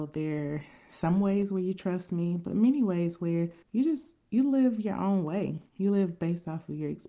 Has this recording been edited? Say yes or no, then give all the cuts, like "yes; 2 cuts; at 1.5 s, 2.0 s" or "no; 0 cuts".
yes; 2 cuts; at 3.6 s, 5.7 s